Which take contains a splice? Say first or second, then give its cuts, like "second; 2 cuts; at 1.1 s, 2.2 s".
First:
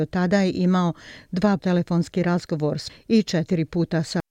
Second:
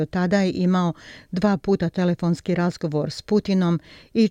first; 2 cuts; at 1.6 s, 2.9 s